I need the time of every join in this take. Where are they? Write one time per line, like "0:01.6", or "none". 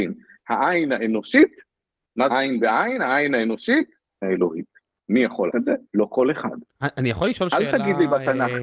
0:02.3
0:04.2
0:05.5